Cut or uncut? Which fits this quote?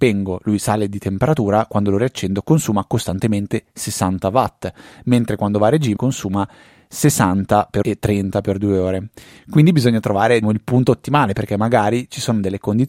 cut